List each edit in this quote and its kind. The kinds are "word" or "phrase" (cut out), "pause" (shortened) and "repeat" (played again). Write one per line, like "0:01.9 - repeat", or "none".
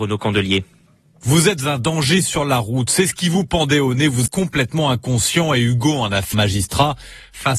0:04.3 - word
0:06.3 - phrase